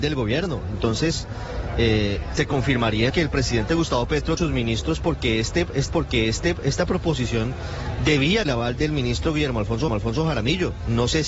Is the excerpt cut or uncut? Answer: cut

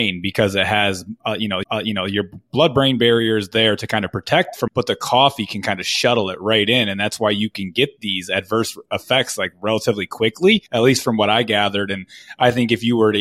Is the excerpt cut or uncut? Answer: cut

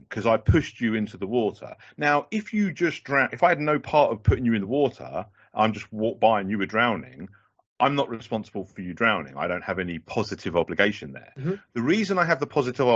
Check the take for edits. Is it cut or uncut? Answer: uncut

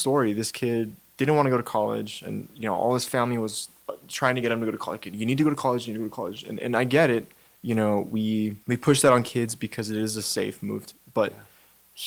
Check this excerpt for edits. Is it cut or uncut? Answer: cut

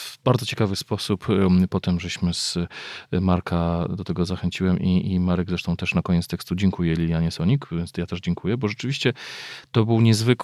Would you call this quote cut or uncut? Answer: uncut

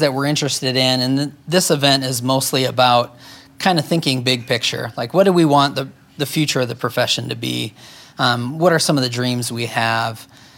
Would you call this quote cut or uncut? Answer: uncut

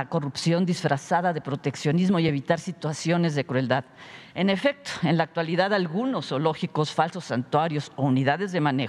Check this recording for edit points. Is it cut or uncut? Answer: uncut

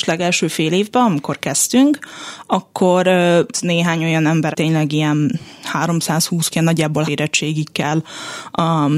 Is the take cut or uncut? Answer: cut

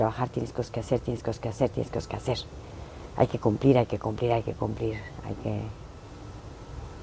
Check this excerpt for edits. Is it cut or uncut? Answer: uncut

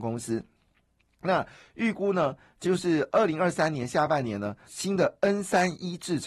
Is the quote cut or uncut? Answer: cut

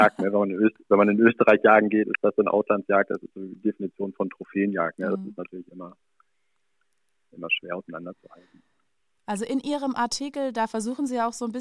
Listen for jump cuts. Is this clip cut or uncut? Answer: uncut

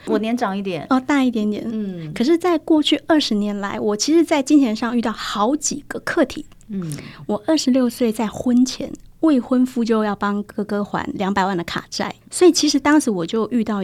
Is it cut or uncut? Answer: cut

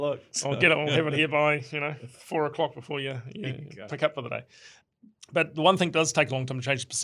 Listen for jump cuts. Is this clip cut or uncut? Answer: uncut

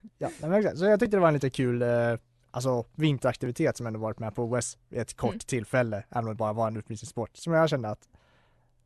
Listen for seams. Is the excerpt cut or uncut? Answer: uncut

